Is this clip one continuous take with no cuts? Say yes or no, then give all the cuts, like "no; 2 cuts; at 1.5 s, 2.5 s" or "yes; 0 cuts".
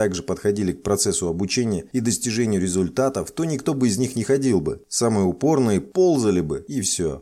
yes; 0 cuts